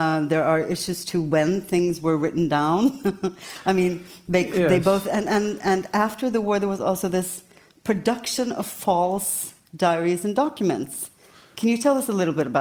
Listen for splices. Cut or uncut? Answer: uncut